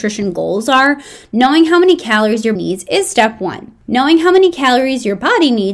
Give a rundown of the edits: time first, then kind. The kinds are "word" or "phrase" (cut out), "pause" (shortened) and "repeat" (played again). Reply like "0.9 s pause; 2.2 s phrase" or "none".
2.6 s word

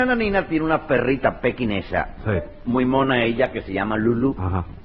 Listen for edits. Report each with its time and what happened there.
none

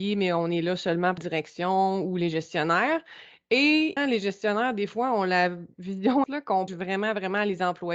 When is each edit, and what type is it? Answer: 1.2 s word; 4.0 s word; 6.2 s word; 6.7 s word

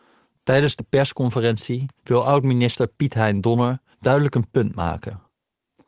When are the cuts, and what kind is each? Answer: 2.0 s pause; 3.9 s pause

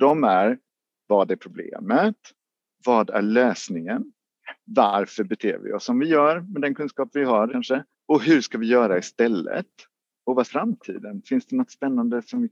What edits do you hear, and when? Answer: 7.5 s word; 7.9 s pause; 10.4 s word

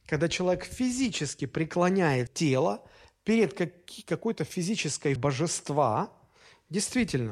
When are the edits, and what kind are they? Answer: 2.3 s word; 5.2 s word

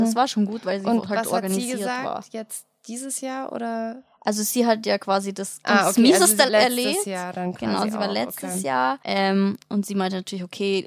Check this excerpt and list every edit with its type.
5.6 s phrase; 6.5 s word; 9.0 s pause

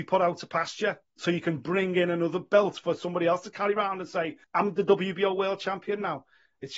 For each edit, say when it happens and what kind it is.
1.1 s pause; 4.4 s pause

